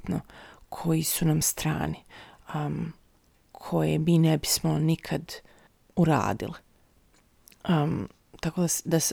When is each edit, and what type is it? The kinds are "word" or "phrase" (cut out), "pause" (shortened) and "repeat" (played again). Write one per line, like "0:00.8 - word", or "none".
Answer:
none